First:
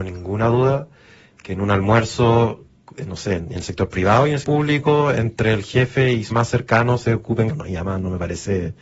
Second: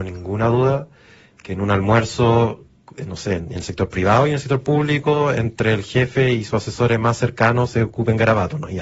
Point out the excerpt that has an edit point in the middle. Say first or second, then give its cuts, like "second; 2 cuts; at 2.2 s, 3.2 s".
first; 3 cuts; at 4.4 s, 6.3 s, 7.5 s